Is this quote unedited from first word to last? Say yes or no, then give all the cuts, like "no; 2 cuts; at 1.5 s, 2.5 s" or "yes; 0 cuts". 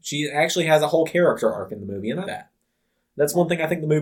no; 1 cut; at 2.2 s